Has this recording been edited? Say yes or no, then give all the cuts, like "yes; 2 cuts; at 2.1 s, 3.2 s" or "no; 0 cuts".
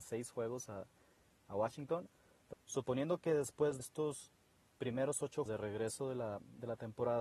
yes; 3 cuts; at 2.5 s, 3.8 s, 5.5 s